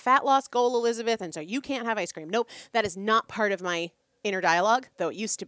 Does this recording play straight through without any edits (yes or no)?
yes